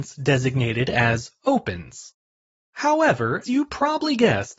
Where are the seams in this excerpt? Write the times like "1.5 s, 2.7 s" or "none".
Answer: 3.4 s

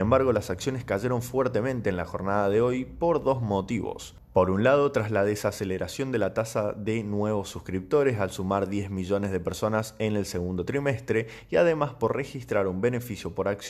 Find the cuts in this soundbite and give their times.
none

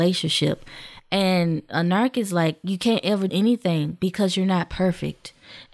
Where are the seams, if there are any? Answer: 3.3 s

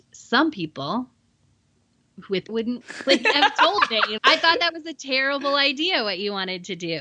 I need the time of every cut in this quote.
2.5 s, 2.8 s, 4.2 s

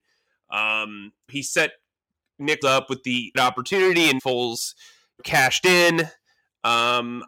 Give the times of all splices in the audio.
1.3 s, 2.6 s, 3.3 s, 4.2 s, 5.2 s

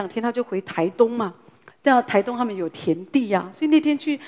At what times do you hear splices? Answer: none

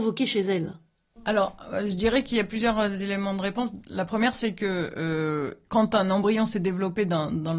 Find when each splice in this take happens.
1.0 s, 5.6 s

